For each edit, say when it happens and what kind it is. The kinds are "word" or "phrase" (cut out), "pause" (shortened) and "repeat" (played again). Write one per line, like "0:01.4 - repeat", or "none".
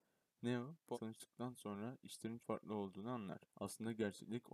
0:00.9 - word
0:02.4 - word
0:03.5 - pause